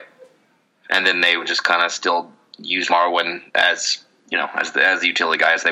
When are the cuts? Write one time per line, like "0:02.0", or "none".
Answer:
0:03.5